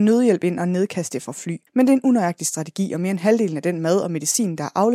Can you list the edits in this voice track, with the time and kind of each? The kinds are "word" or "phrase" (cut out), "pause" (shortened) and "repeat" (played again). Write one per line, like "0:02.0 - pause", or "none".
0:01.7 - pause